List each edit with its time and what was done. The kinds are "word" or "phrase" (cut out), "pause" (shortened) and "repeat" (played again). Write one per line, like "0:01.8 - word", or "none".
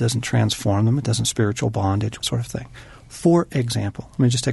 0:01.2 - phrase
0:02.2 - phrase